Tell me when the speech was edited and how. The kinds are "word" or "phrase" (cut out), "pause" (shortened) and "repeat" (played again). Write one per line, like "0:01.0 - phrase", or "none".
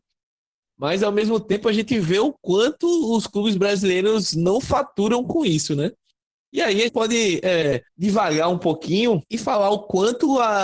0:06.9 - word
0:07.9 - pause
0:09.3 - pause